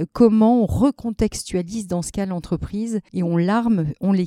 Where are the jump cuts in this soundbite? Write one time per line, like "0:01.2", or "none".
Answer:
none